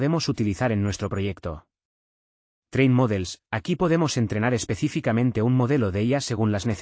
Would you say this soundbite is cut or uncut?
uncut